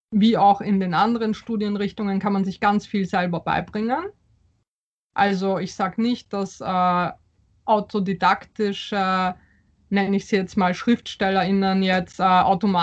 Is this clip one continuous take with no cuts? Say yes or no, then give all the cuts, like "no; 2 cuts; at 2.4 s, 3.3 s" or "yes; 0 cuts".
yes; 0 cuts